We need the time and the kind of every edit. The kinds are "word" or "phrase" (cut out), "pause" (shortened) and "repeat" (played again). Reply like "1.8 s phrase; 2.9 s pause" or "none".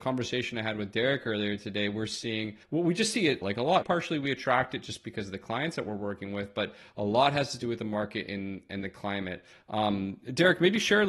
2.6 s pause; 3.4 s phrase; 3.8 s word